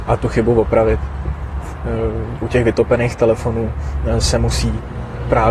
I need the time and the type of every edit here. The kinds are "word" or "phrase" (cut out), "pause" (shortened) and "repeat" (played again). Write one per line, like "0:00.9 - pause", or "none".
0:02.4 - word